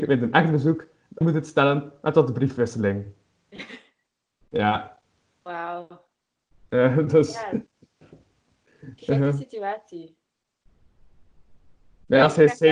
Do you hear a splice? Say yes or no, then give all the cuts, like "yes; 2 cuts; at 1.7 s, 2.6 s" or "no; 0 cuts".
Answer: yes; 1 cut; at 1.2 s